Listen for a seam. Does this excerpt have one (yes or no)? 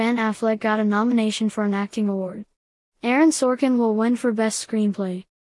no